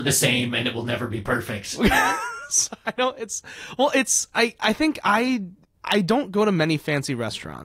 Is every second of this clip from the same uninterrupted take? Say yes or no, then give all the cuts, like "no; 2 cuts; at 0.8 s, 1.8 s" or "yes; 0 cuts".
no; 1 cut; at 5.6 s